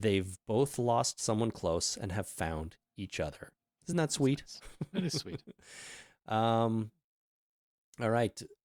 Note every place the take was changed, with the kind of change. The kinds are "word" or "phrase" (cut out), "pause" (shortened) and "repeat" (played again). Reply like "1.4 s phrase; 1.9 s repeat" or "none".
none